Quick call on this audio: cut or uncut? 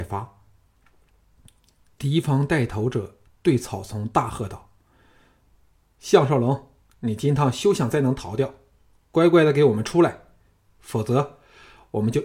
uncut